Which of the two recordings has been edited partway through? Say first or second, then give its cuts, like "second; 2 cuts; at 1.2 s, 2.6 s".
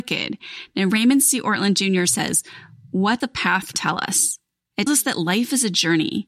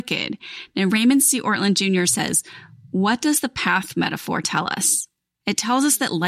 first; 3 cuts; at 3.2 s, 3.7 s, 4.9 s